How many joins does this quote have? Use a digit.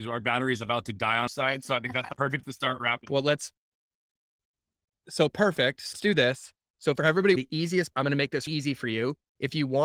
6